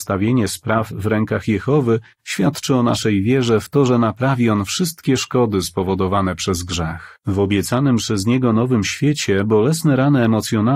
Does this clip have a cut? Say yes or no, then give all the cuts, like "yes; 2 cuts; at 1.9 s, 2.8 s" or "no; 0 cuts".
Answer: yes; 1 cut; at 7.2 s